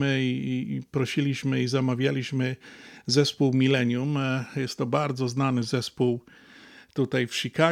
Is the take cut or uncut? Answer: uncut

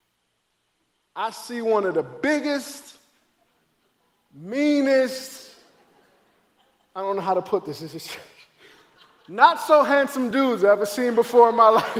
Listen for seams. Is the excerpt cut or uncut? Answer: uncut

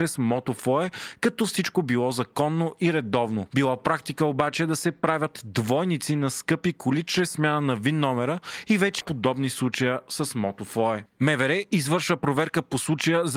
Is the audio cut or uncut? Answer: cut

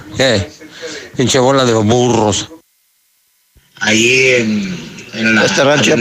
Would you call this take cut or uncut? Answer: uncut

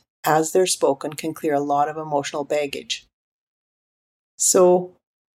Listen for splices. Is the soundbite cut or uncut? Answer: uncut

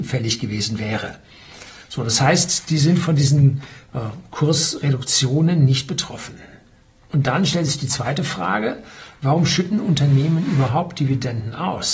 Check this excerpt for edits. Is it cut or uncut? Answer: uncut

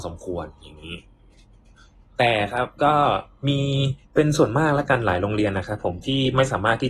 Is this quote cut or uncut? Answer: cut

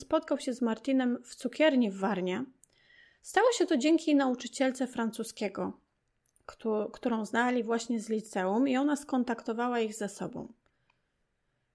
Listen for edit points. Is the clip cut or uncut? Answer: uncut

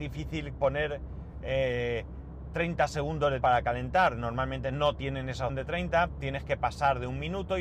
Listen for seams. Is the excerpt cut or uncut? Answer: cut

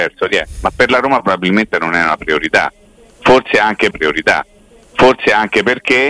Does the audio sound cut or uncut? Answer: cut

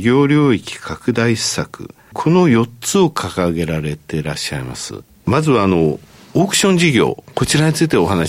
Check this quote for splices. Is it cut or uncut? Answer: uncut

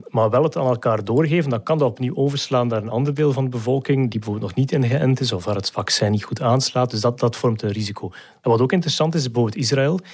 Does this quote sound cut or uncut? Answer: uncut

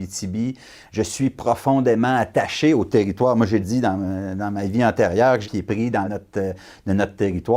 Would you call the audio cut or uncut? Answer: cut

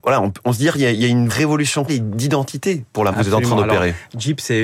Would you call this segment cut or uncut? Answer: cut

